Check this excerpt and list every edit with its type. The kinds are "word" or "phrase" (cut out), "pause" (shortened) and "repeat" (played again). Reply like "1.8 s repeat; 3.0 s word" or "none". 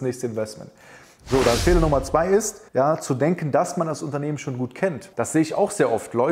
2.7 s pause